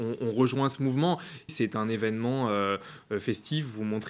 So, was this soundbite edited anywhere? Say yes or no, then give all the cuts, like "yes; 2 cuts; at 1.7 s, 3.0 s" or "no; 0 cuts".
yes; 1 cut; at 1.5 s